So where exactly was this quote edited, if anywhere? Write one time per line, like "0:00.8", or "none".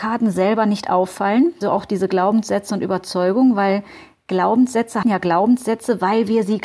0:01.6
0:05.0